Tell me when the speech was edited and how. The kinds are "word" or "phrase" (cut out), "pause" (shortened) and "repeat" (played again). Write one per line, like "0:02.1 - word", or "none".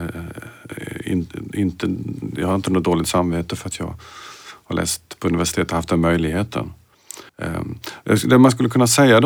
0:07.3 - pause

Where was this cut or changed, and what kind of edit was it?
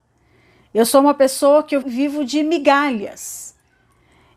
0:01.8 - word

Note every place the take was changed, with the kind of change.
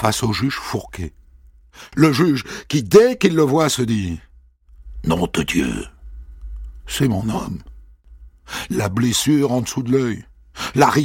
none

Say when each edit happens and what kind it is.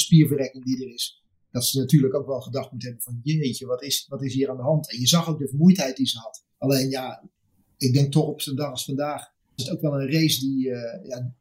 0:06.5 - pause
0:09.6 - word

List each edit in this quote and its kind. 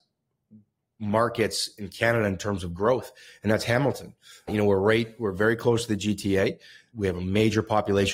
none

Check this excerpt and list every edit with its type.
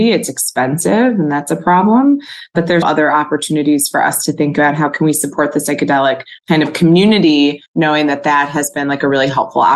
0:02.8 - word
0:06.4 - pause
0:07.7 - pause

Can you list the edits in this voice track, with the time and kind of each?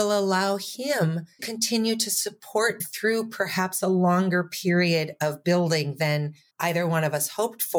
0:01.4 - word
0:02.8 - word
0:06.5 - pause

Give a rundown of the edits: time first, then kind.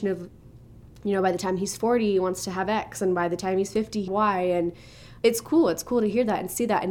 0:04.1 - phrase
0:05.2 - word

